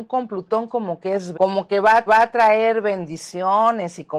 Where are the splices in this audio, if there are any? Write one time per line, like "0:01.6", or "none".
0:01.3
0:02.1